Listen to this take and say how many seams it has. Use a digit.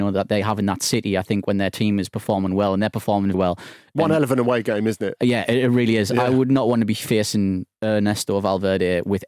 2